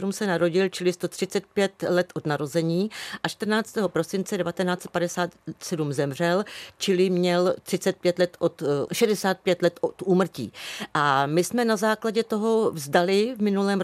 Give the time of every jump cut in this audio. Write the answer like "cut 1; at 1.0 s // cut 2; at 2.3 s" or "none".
cut 1; at 8.9 s